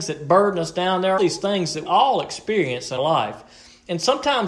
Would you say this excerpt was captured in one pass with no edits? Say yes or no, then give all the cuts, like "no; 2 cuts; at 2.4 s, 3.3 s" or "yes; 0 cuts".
no; 3 cuts; at 1.2 s, 1.8 s, 3.0 s